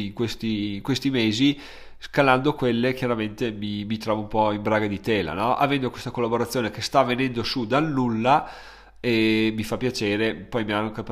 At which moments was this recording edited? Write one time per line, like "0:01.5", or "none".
none